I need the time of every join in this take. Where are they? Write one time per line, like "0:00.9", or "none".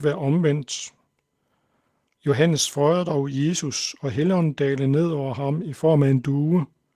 none